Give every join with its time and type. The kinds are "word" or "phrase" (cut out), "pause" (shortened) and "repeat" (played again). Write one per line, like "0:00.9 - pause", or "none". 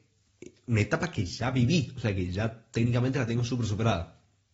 none